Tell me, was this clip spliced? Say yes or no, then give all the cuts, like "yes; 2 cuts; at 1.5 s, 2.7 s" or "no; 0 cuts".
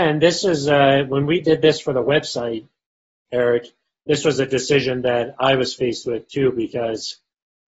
no; 0 cuts